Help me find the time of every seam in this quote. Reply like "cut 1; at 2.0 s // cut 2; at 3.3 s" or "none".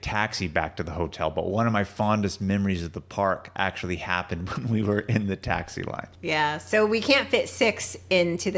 cut 1; at 6.1 s